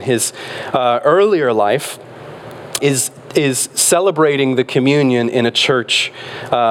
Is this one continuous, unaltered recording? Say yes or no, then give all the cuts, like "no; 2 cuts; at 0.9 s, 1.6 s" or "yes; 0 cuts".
no; 1 cut; at 2.8 s